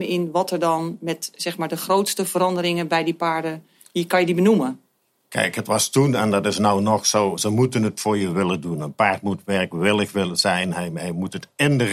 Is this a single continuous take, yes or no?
yes